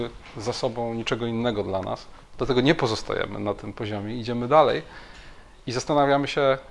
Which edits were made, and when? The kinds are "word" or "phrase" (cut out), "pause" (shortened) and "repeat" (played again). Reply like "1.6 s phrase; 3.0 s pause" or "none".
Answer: none